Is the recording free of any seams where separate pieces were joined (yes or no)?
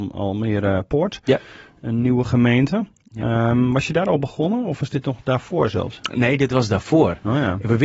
yes